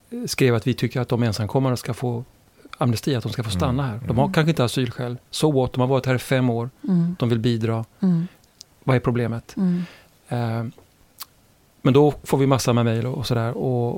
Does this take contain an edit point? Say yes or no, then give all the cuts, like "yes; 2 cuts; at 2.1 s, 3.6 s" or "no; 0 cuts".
no; 0 cuts